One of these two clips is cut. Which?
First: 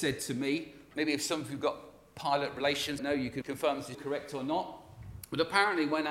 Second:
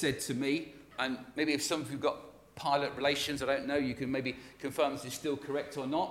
first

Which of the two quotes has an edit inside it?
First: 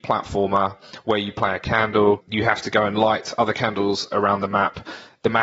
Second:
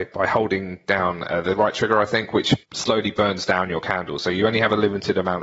second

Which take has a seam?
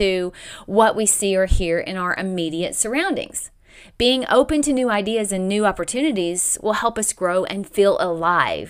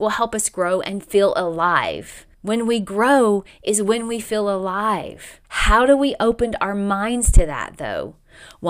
second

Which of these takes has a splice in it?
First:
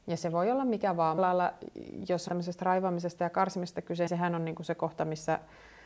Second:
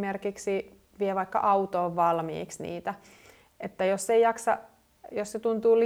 first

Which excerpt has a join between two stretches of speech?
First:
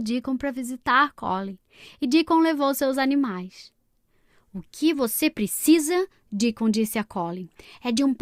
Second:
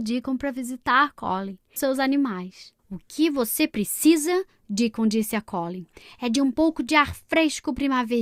second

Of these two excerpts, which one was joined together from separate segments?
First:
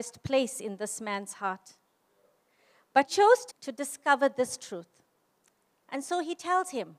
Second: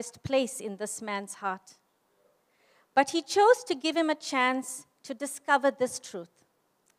first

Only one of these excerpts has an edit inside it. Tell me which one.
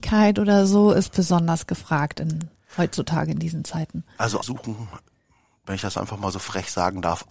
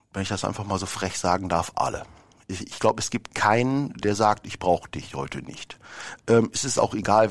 first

